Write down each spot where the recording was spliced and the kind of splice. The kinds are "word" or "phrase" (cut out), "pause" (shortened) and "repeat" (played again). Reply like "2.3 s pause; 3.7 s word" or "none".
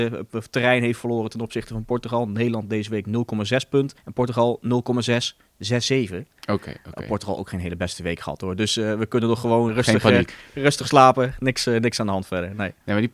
4.0 s pause; 9.7 s word